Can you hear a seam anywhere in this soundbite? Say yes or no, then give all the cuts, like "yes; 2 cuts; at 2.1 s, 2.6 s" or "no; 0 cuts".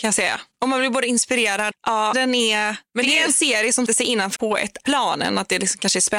yes; 6 cuts; at 1.7 s, 2.1 s, 3.3 s, 3.9 s, 4.4 s, 4.8 s